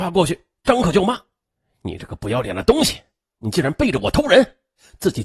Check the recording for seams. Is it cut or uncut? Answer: uncut